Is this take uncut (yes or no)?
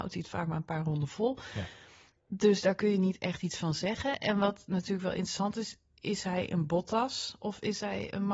yes